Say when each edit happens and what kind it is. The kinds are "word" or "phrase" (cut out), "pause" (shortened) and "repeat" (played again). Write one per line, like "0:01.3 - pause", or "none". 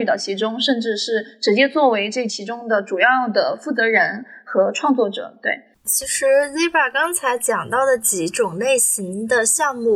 0:05.8 - pause